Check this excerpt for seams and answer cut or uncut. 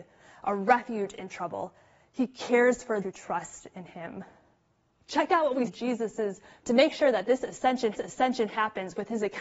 cut